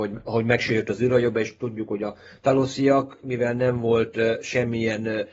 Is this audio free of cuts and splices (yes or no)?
yes